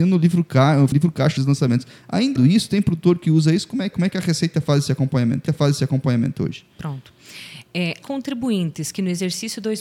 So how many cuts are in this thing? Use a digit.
6